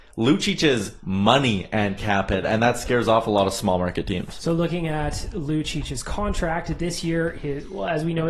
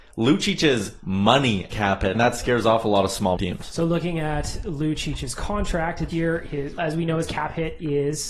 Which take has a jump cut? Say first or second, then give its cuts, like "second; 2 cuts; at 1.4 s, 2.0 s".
second; 5 cuts; at 1.7 s, 2.1 s, 3.4 s, 6.1 s, 6.8 s